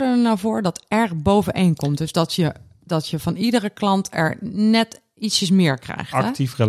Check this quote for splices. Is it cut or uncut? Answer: uncut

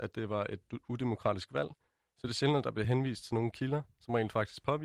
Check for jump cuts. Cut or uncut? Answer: uncut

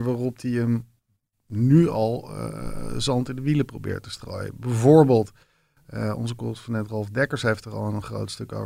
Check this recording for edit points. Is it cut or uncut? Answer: uncut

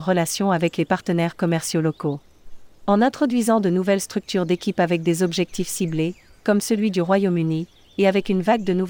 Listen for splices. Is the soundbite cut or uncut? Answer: uncut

